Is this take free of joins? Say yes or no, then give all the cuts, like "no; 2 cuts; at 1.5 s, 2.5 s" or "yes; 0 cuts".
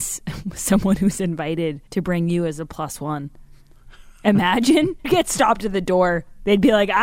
no; 2 cuts; at 1.9 s, 5.0 s